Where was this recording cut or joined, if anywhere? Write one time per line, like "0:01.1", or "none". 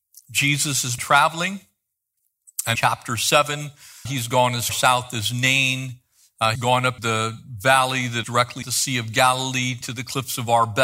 0:01.0
0:02.8
0:04.1
0:04.7
0:06.6
0:07.0
0:08.2
0:08.6
0:09.8